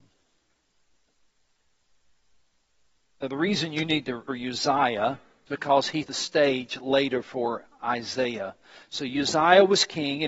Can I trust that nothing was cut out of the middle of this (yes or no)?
no